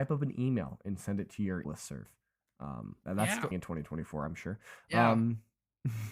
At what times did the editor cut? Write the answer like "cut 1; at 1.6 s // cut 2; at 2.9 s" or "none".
cut 1; at 1.6 s // cut 2; at 3.0 s // cut 3; at 3.5 s